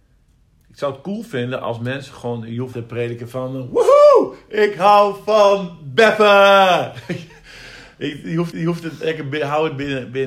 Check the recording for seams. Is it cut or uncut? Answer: cut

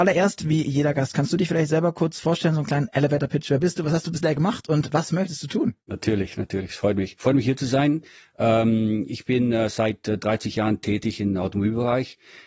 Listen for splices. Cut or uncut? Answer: uncut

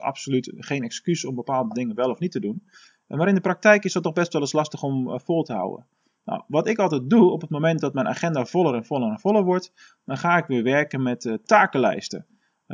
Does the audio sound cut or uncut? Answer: uncut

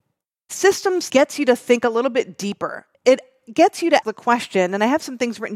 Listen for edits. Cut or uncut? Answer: cut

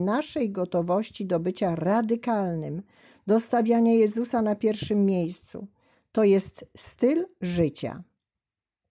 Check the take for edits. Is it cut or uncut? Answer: uncut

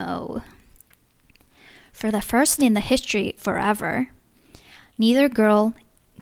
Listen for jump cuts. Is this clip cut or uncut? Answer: cut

